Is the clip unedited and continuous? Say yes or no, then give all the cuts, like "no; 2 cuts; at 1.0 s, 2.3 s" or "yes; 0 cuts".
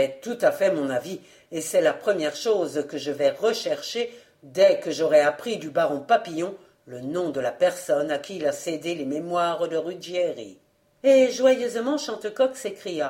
yes; 0 cuts